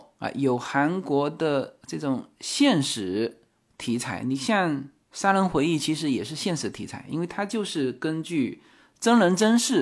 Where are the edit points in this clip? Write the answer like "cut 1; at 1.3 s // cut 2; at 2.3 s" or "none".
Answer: none